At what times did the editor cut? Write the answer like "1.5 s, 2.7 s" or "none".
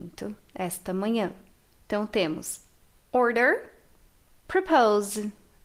none